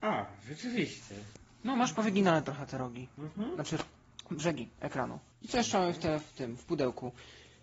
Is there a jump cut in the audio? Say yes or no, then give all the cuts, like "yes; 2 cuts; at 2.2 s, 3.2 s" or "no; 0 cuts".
no; 0 cuts